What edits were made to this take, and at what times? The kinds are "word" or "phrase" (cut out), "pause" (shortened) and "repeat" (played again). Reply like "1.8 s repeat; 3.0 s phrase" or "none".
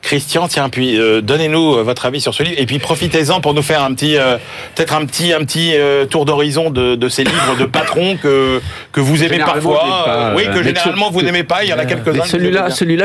none